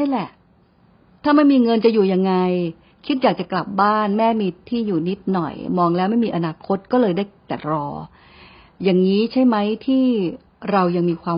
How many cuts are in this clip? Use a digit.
0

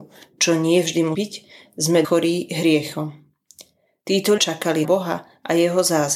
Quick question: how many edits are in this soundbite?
4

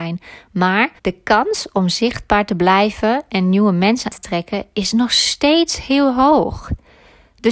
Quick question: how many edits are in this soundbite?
2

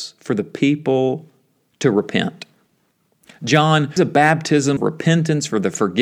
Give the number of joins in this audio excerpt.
2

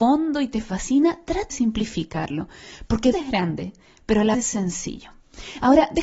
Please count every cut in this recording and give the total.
3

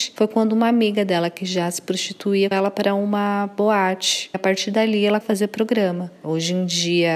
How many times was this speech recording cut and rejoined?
3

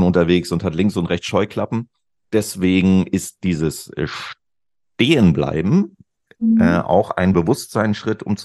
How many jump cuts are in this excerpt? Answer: 0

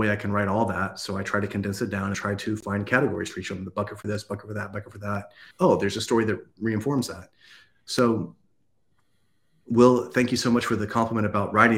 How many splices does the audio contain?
2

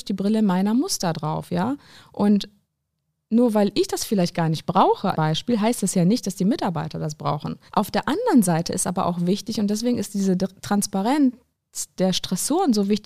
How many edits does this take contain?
2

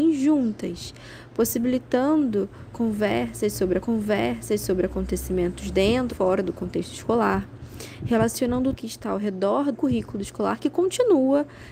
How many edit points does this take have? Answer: 4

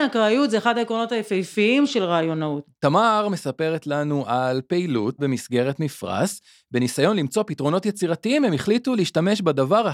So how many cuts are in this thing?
1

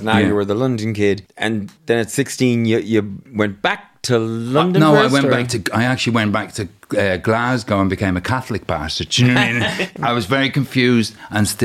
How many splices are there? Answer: 1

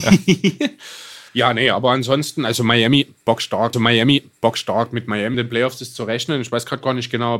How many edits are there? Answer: 3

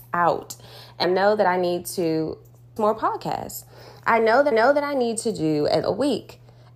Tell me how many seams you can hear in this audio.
4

